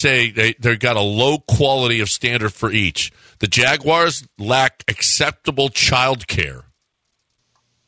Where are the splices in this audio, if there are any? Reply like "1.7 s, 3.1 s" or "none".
none